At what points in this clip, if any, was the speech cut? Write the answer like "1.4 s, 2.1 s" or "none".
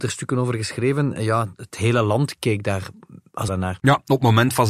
1.7 s, 3.5 s, 3.8 s